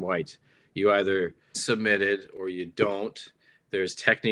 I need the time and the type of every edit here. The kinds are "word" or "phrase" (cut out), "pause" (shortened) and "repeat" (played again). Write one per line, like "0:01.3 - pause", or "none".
0:01.5 - word